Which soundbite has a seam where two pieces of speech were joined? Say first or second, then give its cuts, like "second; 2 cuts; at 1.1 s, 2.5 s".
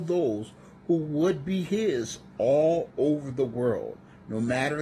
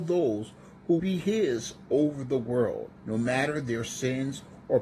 second; 3 cuts; at 1.0 s, 1.9 s, 3.0 s